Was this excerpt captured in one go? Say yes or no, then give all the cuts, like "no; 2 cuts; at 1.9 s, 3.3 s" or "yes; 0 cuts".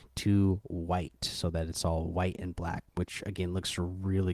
yes; 0 cuts